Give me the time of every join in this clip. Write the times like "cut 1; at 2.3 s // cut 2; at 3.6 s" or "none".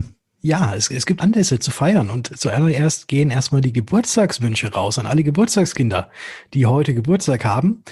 cut 1; at 1.2 s